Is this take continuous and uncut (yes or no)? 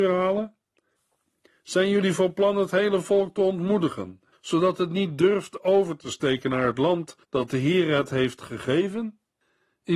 no